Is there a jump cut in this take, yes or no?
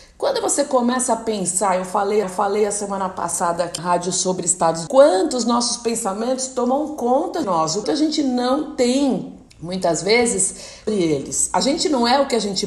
yes